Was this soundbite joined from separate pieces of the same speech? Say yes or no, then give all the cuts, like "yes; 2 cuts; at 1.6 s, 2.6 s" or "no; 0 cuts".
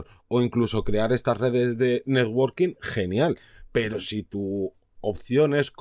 no; 0 cuts